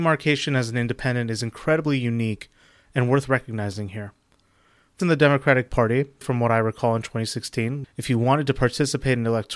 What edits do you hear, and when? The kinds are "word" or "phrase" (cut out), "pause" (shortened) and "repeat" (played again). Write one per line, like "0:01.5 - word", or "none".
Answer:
0:05.0 - word
0:06.2 - word
0:07.8 - word